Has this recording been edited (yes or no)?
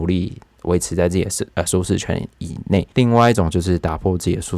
yes